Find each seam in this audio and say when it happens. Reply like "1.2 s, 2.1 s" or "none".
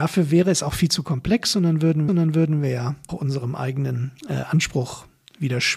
2.1 s, 3.1 s, 4.2 s